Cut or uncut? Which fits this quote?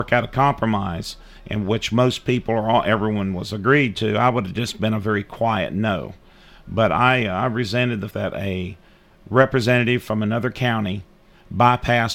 cut